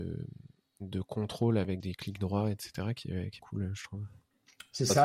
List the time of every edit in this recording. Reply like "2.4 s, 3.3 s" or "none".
1.8 s, 3.4 s